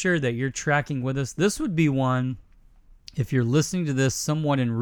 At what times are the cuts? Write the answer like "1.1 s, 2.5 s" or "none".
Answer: none